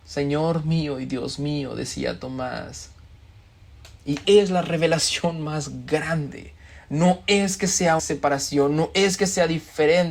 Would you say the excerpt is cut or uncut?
cut